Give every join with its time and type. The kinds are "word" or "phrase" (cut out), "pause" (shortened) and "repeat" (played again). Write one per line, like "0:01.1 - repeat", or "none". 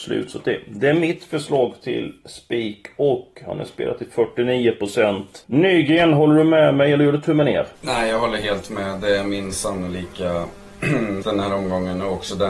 0:05.4 - pause
0:07.8 - pause
0:11.2 - word